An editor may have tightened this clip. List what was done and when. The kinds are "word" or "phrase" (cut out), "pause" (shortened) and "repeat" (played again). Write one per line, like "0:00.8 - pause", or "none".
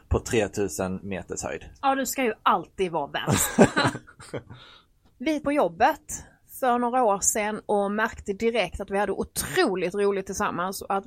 0:01.8 - pause
0:05.4 - word